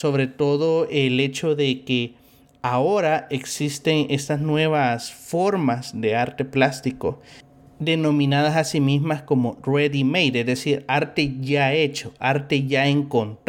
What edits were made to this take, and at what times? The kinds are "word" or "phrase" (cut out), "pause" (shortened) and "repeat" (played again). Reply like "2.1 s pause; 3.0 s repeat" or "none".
none

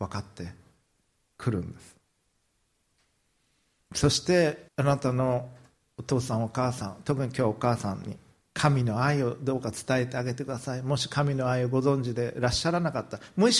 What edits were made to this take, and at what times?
4.7 s pause

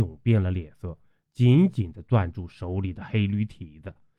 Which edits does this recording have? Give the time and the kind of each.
none

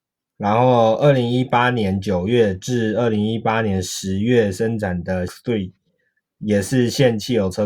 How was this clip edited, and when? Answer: 5.3 s word

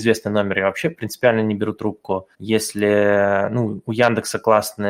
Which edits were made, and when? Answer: 2.3 s pause

